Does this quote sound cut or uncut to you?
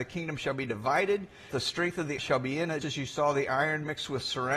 cut